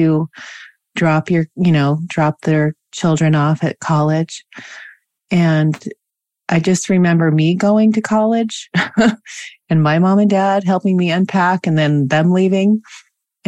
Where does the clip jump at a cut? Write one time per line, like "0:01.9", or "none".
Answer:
none